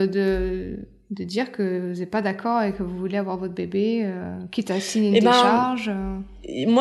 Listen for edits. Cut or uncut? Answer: uncut